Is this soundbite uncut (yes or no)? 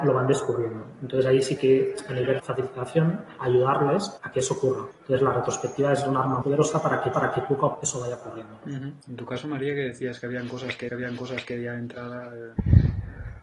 no